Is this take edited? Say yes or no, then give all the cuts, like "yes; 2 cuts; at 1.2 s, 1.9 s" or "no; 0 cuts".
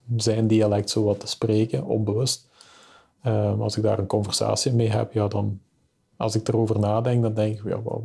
no; 0 cuts